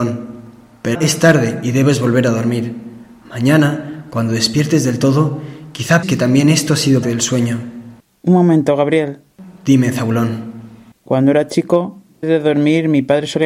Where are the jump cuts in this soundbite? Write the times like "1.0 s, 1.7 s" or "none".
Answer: 0.9 s, 6.0 s, 7.0 s, 12.2 s